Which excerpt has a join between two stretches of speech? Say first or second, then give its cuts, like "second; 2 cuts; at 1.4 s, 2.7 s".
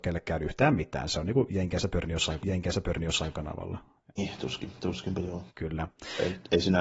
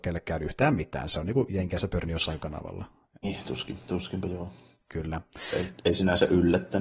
first; 2 cuts; at 2.4 s, 5.5 s